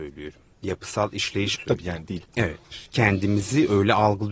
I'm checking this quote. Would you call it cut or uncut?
cut